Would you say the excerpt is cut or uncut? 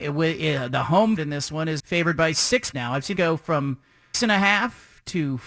cut